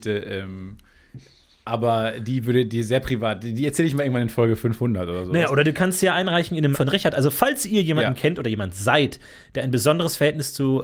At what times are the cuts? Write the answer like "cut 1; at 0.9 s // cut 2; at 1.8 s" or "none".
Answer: cut 1; at 6.7 s